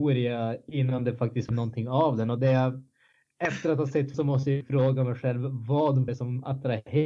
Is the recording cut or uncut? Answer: cut